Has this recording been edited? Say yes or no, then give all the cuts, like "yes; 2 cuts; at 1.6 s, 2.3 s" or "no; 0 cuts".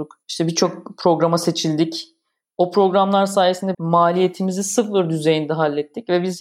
yes; 1 cut; at 3.7 s